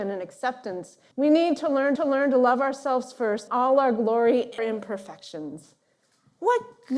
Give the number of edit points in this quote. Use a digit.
4